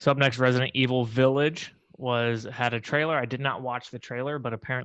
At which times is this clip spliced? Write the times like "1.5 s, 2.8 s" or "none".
none